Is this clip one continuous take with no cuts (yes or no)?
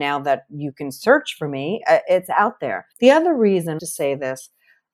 no